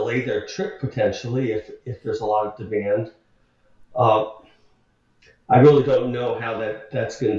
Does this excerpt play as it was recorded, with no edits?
yes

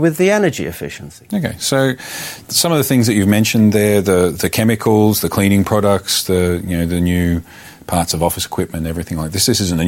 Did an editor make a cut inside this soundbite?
no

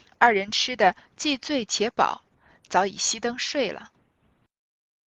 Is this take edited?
no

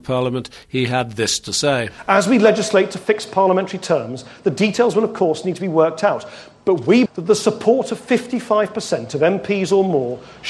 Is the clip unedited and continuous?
no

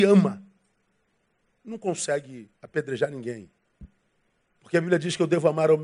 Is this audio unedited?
no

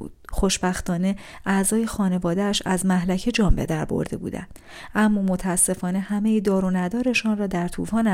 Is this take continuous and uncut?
yes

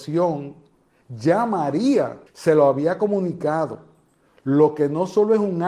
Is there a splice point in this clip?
yes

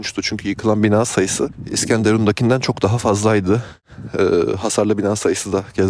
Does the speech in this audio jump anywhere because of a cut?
no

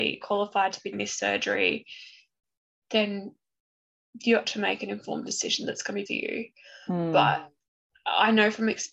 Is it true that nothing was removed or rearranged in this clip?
no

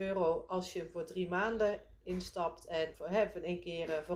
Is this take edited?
yes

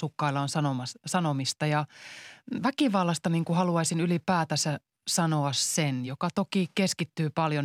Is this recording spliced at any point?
no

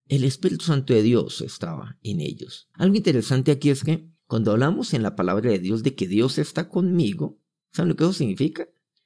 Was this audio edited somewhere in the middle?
yes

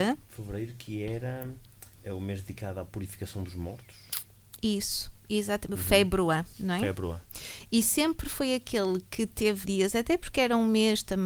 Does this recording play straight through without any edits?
no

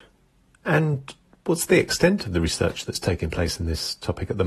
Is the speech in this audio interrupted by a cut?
no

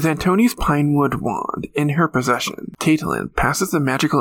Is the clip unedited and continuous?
yes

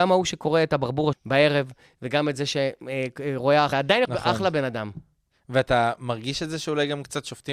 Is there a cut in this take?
yes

